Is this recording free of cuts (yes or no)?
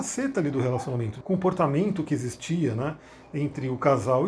no